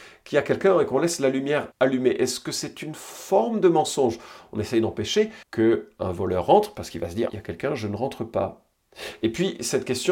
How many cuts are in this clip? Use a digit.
3